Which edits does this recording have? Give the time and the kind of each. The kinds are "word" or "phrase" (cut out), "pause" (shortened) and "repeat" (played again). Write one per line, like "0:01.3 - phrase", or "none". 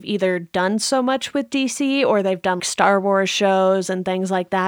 0:02.6 - word